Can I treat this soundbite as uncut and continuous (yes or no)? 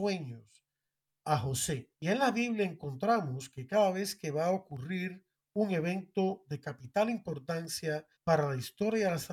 no